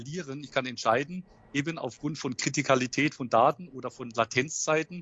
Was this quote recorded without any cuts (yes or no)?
yes